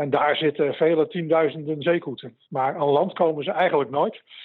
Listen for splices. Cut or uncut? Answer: uncut